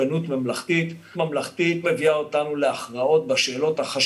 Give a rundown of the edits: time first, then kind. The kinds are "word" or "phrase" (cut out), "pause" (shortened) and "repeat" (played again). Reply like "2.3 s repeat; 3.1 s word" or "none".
1.1 s word; 1.8 s word